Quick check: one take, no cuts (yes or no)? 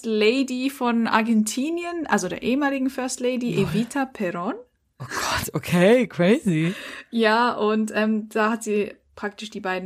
yes